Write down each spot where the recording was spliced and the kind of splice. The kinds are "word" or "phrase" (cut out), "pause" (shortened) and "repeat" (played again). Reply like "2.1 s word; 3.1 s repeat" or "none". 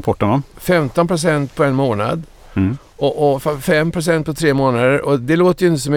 none